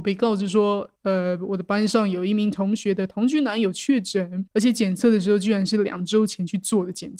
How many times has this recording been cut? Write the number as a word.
two